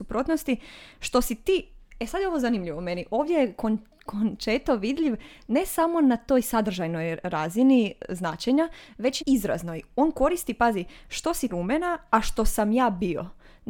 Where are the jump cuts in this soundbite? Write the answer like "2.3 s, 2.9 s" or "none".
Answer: 9.2 s, 11.5 s